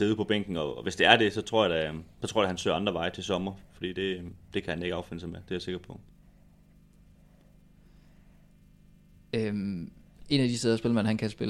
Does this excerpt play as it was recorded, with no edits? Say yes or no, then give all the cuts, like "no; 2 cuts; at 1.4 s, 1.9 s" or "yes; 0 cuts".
yes; 0 cuts